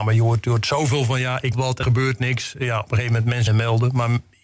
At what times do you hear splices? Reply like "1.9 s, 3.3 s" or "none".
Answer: 1.5 s, 1.8 s, 3.5 s

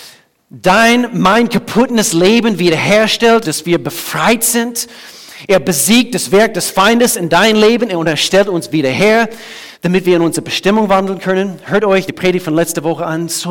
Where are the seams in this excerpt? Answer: 3.4 s, 9.7 s, 12.1 s

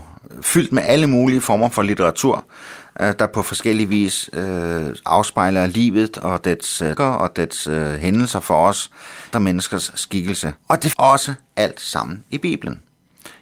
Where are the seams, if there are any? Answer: 7.0 s, 9.3 s, 10.6 s, 10.9 s

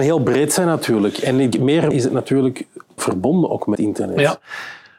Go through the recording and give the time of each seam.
1.5 s, 1.9 s, 3.0 s, 3.7 s

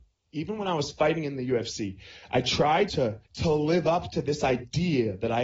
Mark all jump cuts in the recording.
2.9 s, 3.3 s

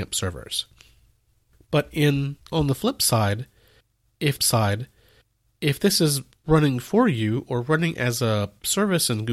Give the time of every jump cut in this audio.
2.4 s, 4.4 s

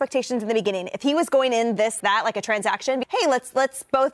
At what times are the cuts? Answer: 2.0 s, 3.0 s

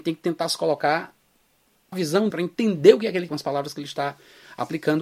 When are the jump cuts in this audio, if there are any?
1.9 s, 2.3 s, 3.3 s

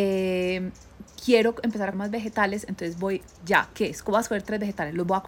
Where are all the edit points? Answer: 1.9 s, 3.4 s

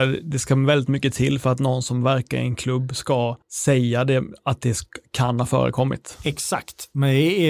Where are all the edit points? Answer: 3.4 s

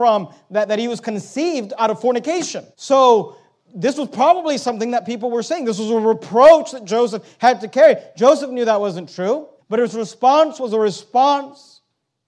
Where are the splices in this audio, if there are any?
2.7 s, 9.6 s

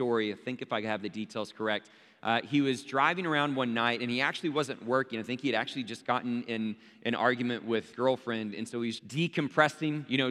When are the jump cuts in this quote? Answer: 7.9 s, 9.0 s

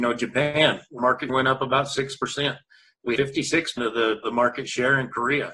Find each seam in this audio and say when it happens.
1.0 s, 1.3 s, 3.2 s, 3.8 s, 4.2 s

